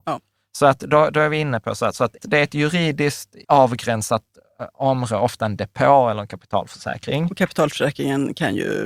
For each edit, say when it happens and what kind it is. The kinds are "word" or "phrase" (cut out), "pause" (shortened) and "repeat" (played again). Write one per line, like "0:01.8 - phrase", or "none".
0:02.2 - word
0:03.4 - pause